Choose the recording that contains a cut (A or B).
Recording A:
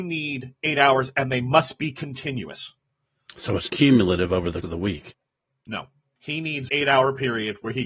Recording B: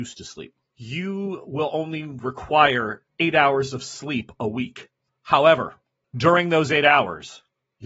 A